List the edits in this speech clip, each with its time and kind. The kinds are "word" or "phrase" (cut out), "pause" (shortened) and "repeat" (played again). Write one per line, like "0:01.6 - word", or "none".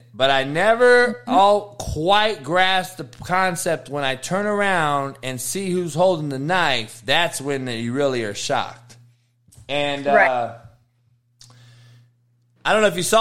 none